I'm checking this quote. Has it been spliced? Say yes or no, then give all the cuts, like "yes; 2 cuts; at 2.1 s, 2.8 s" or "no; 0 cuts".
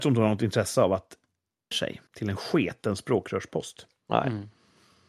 yes; 2 cuts; at 1.7 s, 2.1 s